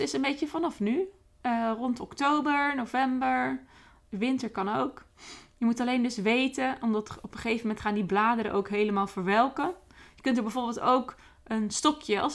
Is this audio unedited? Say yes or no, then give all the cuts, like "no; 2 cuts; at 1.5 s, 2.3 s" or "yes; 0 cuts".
yes; 0 cuts